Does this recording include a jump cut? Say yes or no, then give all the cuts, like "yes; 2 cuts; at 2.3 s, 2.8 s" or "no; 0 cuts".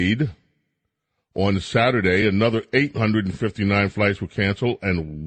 no; 0 cuts